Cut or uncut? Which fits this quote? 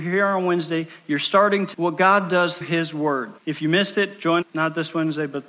cut